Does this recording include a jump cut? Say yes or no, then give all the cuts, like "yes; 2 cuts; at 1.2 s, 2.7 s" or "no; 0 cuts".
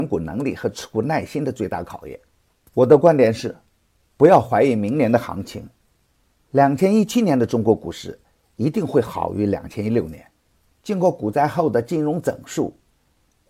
no; 0 cuts